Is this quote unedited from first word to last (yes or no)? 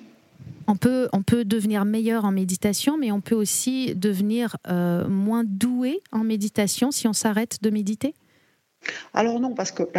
yes